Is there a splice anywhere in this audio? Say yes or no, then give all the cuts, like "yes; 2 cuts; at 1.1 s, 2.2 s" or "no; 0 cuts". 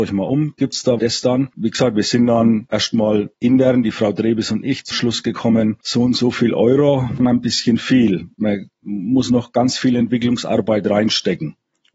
yes; 4 cuts; at 1.0 s, 2.7 s, 4.9 s, 7.2 s